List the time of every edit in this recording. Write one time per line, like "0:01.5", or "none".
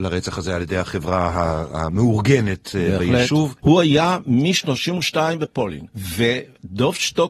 0:03.6